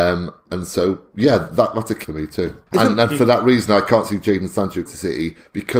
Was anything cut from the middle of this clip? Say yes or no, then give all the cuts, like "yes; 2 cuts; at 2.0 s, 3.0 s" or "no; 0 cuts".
yes; 3 cuts; at 2.0 s, 2.7 s, 4.9 s